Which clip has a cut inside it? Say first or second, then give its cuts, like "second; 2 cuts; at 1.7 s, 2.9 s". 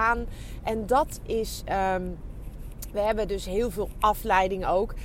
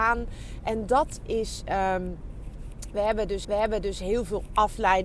second; 1 cut; at 3.4 s